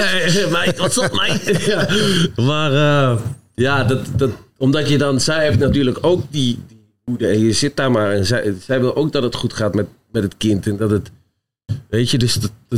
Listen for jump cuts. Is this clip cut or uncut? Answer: uncut